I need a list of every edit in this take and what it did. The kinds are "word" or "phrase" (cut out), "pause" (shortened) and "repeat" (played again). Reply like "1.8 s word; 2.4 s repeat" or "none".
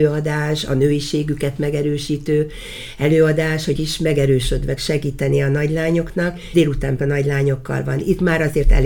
3.8 s word; 4.8 s word; 6.5 s word; 7.0 s word